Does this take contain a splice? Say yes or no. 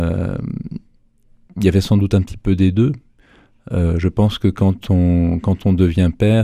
no